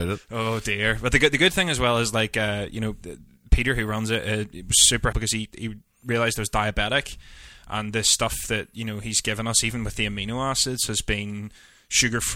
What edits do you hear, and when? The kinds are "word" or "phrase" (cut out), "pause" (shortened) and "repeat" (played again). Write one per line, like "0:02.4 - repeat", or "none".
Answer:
0:05.1 - word

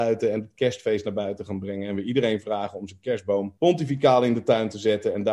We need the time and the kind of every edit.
0:03.6 - pause

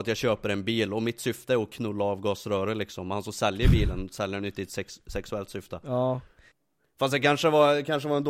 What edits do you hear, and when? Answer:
none

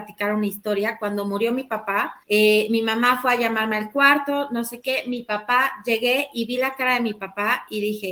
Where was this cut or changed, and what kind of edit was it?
0:02.2 - pause

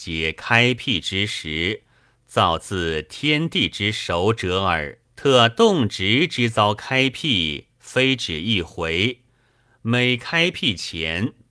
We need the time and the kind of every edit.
0:05.1 - pause

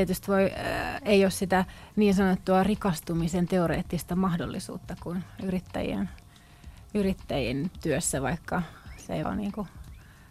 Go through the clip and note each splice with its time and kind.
0:09.2 - word

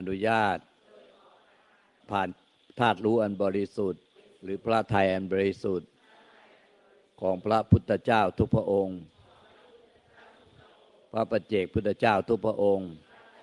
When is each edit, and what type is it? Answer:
0:04.2 - pause

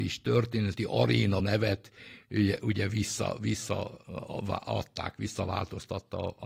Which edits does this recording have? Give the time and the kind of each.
0:01.4 - word

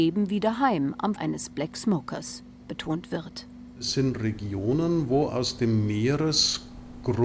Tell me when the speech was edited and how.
0:01.2 - word

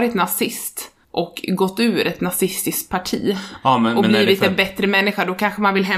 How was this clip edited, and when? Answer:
0:01.0 - pause

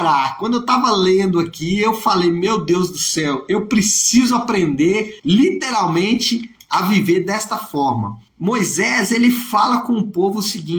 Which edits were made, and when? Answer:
0:05.2 - pause
0:08.3 - pause

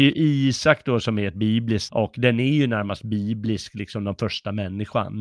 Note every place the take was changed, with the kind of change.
0:01.9 - word

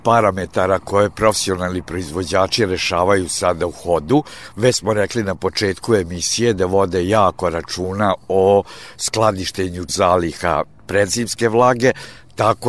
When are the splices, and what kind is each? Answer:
0:09.9 - word

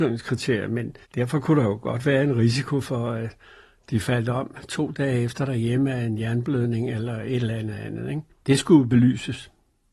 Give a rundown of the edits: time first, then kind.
0:01.0 - pause

